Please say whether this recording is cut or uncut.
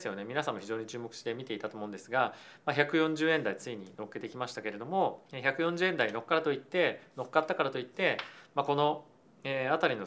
cut